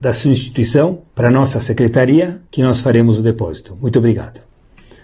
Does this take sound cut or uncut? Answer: cut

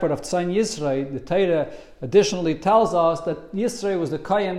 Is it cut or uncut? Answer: uncut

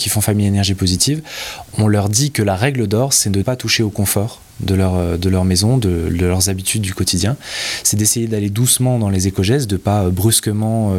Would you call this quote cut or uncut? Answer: cut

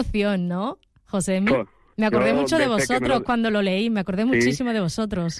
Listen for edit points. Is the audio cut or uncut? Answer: uncut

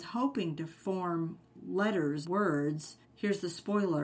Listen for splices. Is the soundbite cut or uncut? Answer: cut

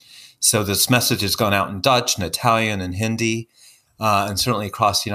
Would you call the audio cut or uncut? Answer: uncut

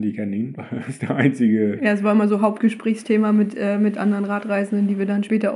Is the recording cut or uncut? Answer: uncut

